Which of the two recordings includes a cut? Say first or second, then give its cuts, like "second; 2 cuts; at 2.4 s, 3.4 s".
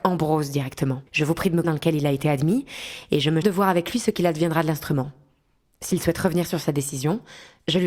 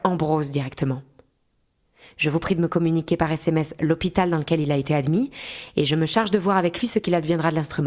first; 3 cuts; at 1.1 s, 1.6 s, 3.4 s